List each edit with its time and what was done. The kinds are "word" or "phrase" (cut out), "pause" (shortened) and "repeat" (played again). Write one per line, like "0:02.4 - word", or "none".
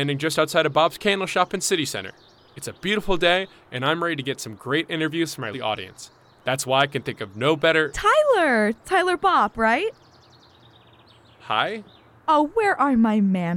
0:05.5 - word